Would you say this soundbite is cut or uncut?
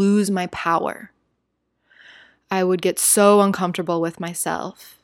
uncut